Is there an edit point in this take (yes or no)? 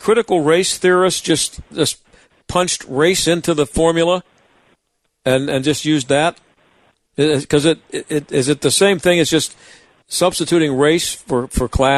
no